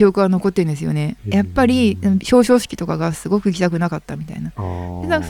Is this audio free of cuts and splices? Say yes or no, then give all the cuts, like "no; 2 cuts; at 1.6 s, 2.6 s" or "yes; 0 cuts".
no; 1 cut; at 1.2 s